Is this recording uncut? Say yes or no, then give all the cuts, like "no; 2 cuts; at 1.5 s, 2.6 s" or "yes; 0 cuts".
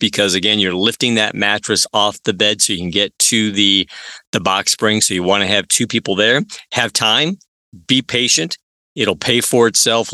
yes; 0 cuts